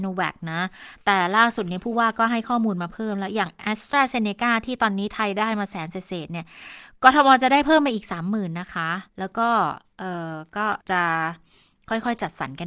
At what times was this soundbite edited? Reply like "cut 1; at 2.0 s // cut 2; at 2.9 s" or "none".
cut 1; at 9.1 s // cut 2; at 10.8 s